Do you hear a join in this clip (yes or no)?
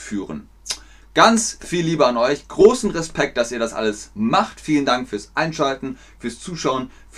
no